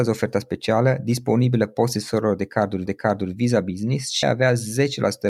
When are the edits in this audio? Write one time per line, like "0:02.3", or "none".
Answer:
0:02.9
0:04.2